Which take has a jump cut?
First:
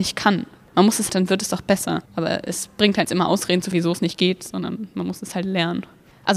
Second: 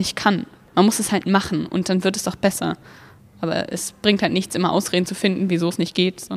first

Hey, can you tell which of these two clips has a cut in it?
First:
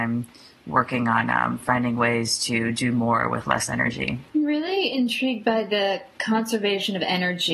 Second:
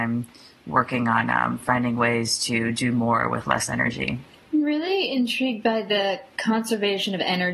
first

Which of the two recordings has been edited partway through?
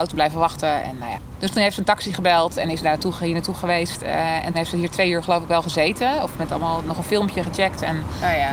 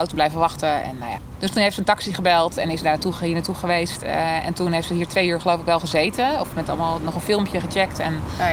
first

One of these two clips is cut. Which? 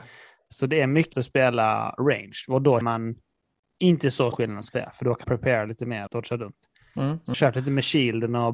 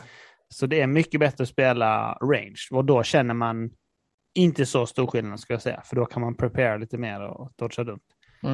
first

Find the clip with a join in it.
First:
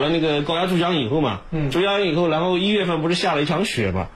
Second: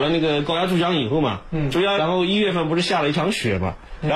second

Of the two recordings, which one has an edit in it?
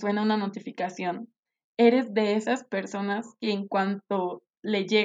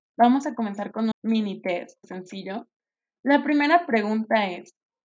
second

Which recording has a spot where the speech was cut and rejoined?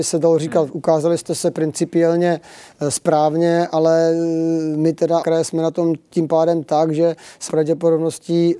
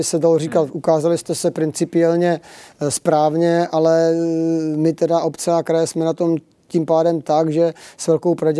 first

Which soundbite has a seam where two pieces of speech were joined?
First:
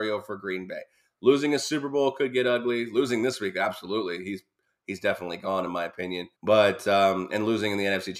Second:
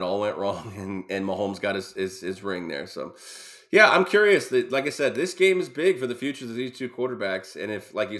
first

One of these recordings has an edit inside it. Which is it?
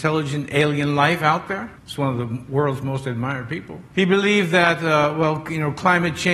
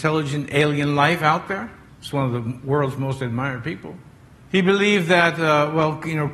first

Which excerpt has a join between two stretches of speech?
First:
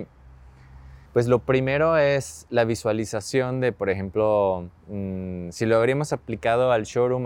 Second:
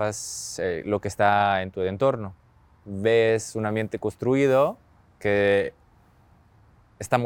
first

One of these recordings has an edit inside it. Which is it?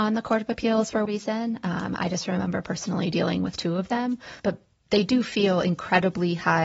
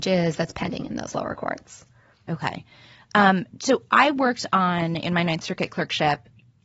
first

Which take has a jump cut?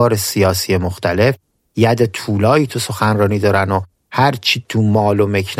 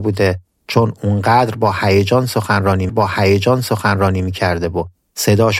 second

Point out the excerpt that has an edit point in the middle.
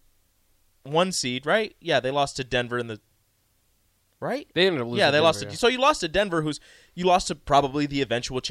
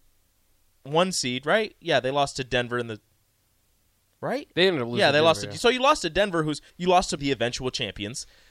second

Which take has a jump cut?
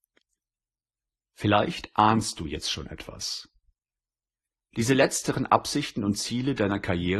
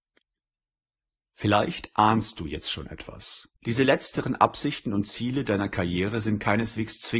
second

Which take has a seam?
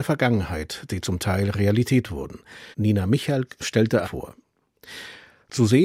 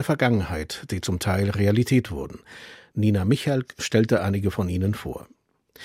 first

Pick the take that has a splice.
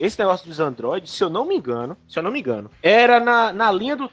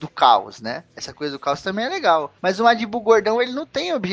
second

